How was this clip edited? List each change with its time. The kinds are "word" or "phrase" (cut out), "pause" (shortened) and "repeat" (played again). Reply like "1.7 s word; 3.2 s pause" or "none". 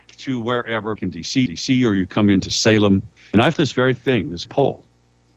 1.0 s word; 1.5 s repeat; 3.2 s pause; 3.5 s word; 4.4 s word